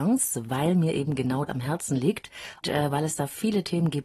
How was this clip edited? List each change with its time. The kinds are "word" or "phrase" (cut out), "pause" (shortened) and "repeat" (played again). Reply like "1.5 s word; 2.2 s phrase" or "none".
1.5 s word; 2.6 s word